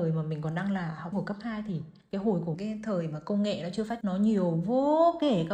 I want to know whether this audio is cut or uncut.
cut